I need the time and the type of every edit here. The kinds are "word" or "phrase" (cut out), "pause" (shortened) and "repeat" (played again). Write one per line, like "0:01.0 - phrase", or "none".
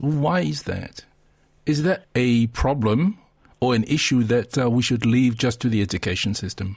none